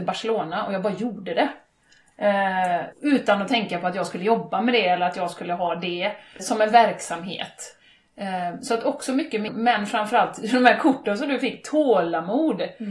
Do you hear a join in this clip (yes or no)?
yes